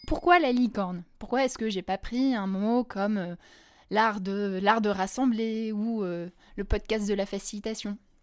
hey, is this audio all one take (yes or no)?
yes